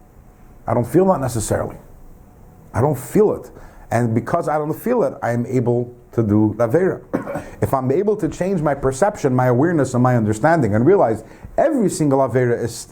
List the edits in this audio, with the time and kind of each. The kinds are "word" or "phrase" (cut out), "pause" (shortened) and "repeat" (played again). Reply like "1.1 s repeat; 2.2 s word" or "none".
6.6 s word